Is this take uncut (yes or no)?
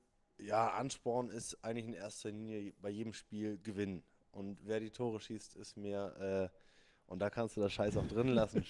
yes